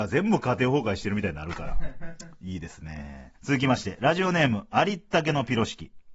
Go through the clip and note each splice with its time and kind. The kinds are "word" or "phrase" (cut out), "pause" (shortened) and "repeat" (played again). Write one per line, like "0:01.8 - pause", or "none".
0:03.4 - pause